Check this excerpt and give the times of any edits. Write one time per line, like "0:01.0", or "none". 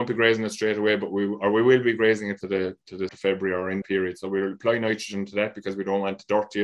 0:02.4
0:03.1
0:03.8